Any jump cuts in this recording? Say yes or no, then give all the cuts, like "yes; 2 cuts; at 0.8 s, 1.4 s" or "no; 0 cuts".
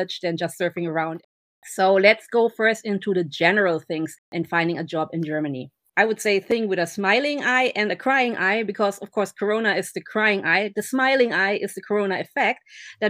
no; 0 cuts